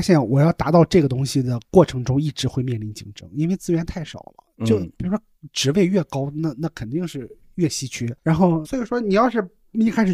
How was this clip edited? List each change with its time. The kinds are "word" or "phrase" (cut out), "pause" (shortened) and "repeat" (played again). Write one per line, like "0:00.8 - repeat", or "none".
0:08.2 - pause
0:08.6 - word